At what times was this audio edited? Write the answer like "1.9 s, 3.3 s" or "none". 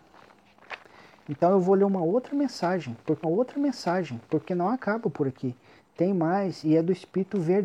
3.2 s

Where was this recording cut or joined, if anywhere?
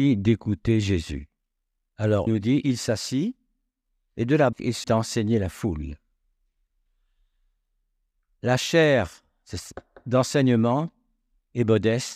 2.3 s, 4.5 s, 4.8 s

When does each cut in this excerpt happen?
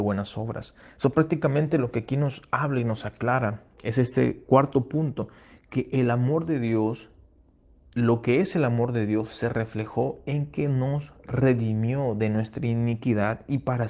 none

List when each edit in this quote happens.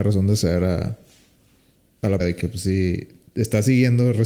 2.2 s

